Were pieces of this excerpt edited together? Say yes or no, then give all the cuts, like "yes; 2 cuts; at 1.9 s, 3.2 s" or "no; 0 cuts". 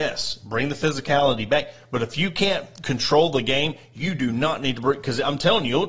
no; 0 cuts